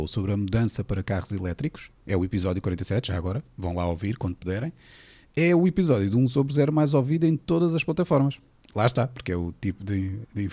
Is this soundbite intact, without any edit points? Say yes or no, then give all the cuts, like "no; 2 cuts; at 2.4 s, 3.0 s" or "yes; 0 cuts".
yes; 0 cuts